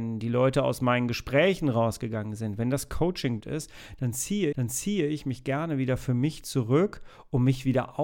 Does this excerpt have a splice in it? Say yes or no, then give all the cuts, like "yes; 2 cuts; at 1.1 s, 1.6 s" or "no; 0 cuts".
yes; 2 cuts; at 3.4 s, 4.5 s